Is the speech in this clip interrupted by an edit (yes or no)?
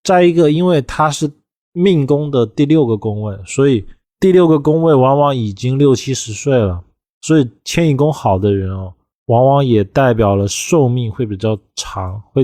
no